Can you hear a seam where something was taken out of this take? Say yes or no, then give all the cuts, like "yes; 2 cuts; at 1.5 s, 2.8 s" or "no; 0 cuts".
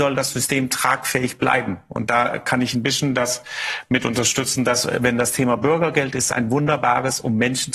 no; 0 cuts